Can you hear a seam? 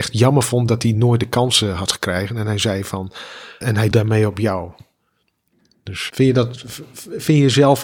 yes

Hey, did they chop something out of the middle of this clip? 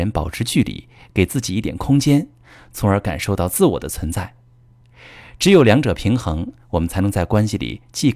no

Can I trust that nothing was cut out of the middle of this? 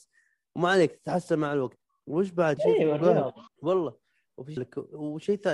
no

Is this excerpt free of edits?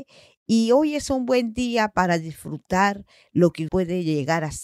no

